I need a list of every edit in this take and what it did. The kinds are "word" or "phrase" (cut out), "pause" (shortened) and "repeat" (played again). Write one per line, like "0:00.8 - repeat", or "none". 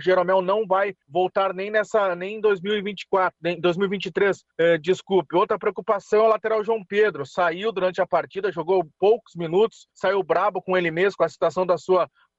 0:01.0 - pause
0:04.5 - pause
0:09.9 - pause